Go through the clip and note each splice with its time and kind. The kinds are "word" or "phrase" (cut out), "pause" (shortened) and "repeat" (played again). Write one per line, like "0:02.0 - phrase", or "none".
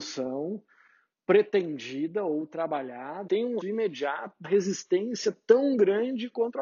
0:03.3 - word
0:03.6 - word
0:04.4 - word